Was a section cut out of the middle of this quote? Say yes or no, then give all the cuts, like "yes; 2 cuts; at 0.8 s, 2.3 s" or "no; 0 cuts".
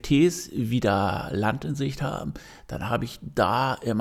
no; 0 cuts